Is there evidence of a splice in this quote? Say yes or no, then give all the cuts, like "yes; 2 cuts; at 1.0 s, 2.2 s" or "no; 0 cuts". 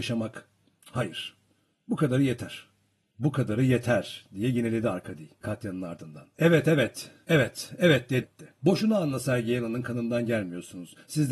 yes; 1 cut; at 8.2 s